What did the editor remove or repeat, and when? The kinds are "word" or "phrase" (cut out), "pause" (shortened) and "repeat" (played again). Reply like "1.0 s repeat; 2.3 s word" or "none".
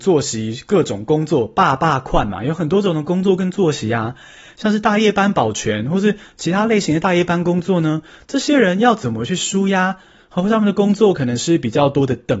none